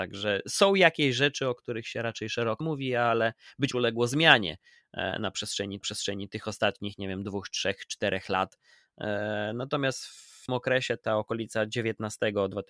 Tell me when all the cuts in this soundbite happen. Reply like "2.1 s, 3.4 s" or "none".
2.6 s, 3.7 s, 5.8 s, 10.5 s